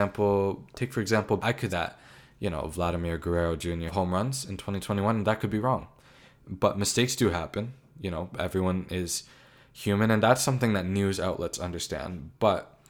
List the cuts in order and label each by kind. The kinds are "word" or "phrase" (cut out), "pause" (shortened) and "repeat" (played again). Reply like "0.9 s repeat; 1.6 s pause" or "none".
1.4 s word; 1.7 s word; 3.9 s phrase